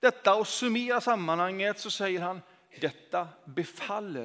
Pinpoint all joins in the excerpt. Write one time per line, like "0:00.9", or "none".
none